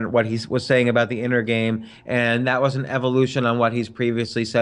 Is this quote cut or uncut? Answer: uncut